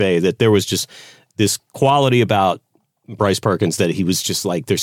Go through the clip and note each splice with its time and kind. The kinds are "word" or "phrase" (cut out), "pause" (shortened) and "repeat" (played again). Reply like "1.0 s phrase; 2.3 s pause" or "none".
none